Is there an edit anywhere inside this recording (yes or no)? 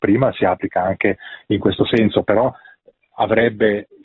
no